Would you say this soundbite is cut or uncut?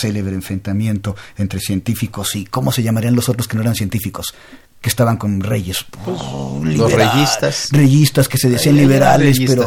uncut